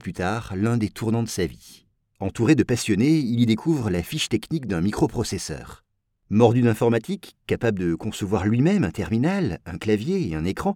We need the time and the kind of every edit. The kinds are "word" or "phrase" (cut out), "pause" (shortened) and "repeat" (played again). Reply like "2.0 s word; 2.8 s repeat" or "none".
none